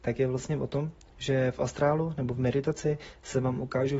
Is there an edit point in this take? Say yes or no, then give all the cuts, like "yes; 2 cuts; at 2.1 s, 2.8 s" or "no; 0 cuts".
no; 0 cuts